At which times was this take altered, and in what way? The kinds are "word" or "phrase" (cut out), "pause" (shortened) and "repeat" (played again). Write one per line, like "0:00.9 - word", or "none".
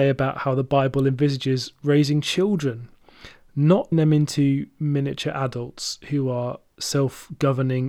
0:03.9 - word